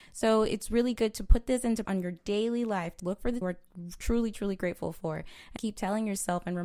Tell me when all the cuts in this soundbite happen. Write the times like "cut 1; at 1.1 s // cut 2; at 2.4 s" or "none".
cut 1; at 1.8 s // cut 2; at 3.0 s // cut 3; at 3.4 s // cut 4; at 5.6 s